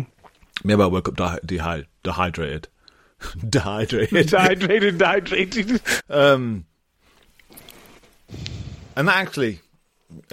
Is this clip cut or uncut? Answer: uncut